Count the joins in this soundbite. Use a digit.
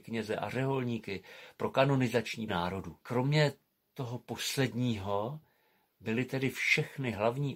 2